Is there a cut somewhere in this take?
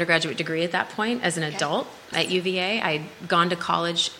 yes; 1 cut; at 2.1 s

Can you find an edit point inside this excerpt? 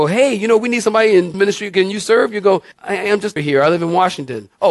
yes; 3 cuts; at 1.3 s, 2.7 s, 3.4 s

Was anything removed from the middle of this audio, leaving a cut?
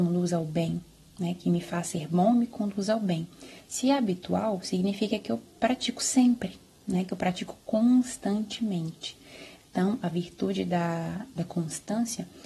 no; 0 cuts

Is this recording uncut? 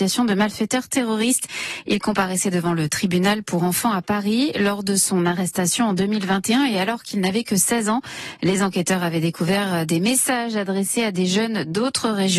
yes; 0 cuts

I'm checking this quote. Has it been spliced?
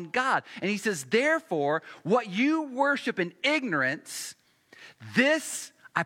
no; 0 cuts

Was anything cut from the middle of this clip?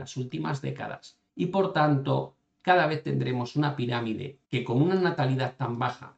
yes; 2 cuts; at 1.3 s, 4.4 s

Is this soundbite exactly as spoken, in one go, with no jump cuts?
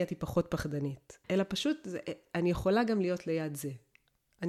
no; 1 cut; at 1.2 s

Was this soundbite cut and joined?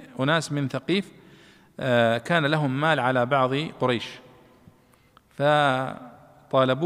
no; 0 cuts

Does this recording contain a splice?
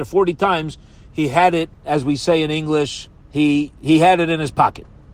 yes; 1 cut; at 3.1 s

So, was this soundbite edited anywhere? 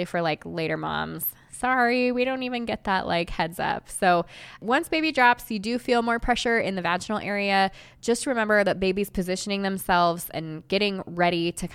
no; 0 cuts

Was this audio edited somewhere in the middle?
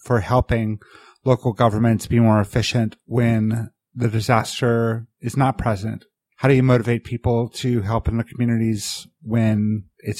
no; 0 cuts

